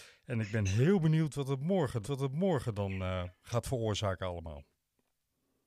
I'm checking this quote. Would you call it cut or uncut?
cut